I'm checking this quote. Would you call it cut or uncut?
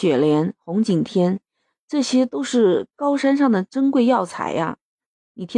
uncut